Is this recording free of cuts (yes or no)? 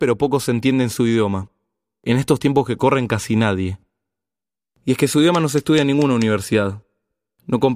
yes